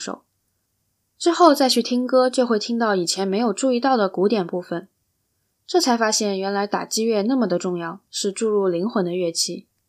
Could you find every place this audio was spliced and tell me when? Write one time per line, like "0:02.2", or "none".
none